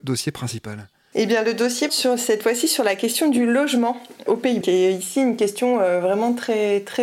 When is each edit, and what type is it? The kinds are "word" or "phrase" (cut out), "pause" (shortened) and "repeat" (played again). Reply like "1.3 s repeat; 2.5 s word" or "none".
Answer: 1.9 s word; 4.6 s word